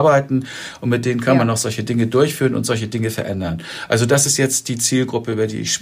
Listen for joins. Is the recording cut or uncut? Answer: uncut